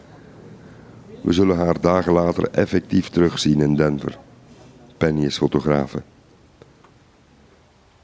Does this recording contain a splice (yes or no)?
no